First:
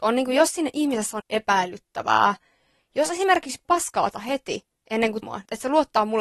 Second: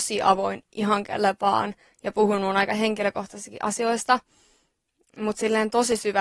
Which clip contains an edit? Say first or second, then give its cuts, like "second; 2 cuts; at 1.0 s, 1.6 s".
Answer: first; 4 cuts; at 1.2 s, 3.6 s, 4.1 s, 5.2 s